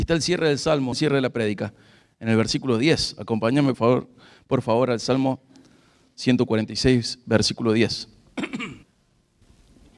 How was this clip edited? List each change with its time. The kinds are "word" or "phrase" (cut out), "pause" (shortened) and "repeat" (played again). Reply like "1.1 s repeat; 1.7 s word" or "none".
0.9 s word; 3.7 s word; 8.8 s pause